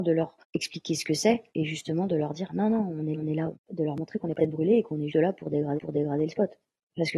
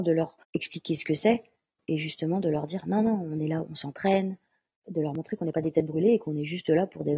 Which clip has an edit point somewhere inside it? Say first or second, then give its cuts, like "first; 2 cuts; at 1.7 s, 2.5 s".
first; 6 cuts; at 1.5 s, 3.1 s, 3.5 s, 4.4 s, 5.1 s, 5.8 s